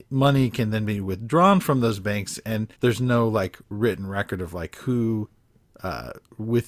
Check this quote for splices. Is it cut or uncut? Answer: cut